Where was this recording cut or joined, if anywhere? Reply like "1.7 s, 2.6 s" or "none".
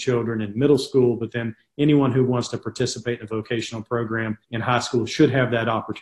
4.4 s